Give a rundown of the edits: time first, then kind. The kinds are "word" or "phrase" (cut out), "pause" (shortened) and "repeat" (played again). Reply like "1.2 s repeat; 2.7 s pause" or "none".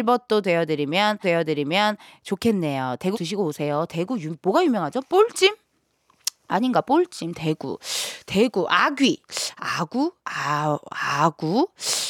1.2 s repeat; 3.1 s phrase; 10.2 s pause